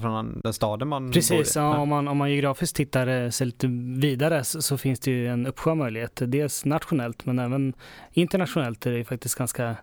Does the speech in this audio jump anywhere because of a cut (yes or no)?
no